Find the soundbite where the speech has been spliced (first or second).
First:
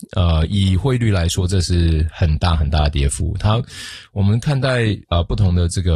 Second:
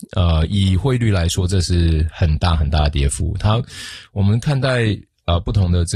first